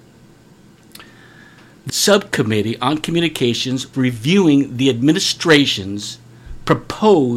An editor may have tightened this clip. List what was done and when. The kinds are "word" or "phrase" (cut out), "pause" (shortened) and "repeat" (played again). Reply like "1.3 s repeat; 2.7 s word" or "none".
1.9 s word; 3.9 s word